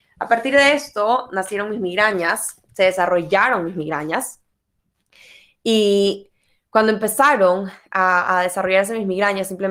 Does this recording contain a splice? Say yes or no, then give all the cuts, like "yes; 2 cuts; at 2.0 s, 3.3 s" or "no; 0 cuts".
no; 0 cuts